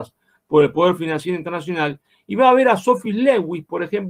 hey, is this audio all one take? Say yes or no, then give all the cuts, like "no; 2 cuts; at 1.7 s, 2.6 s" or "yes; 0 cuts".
yes; 0 cuts